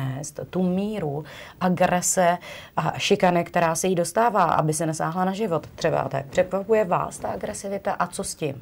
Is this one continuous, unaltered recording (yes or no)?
yes